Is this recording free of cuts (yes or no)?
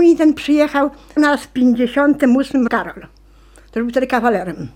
no